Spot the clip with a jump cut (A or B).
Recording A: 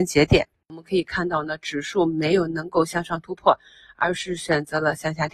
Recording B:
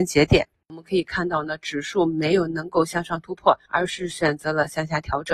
B